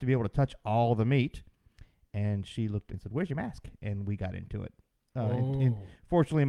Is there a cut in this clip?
yes; 1 cut; at 2.9 s

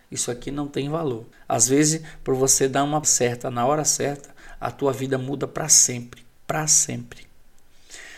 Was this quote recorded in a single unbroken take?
no; 2 cuts; at 1.3 s, 3.0 s

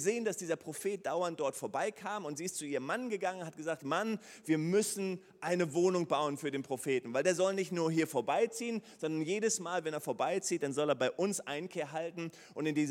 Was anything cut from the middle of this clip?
no; 0 cuts

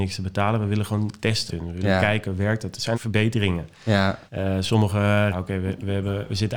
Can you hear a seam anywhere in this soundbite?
yes; 4 cuts; at 1.5 s, 2.9 s, 4.3 s, 5.3 s

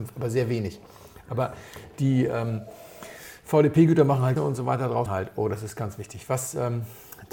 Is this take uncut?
no; 2 cuts; at 4.4 s, 5.1 s

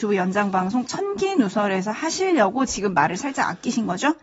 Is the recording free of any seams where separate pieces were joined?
yes; 0 cuts

